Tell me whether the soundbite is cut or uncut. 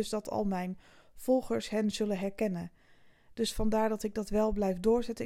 uncut